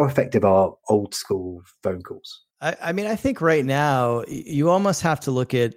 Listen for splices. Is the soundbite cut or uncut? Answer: cut